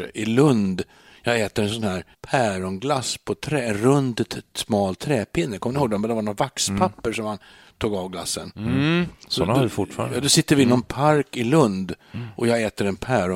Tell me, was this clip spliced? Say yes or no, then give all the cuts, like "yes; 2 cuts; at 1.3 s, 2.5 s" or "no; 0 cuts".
yes; 2 cuts; at 2.1 s, 9.2 s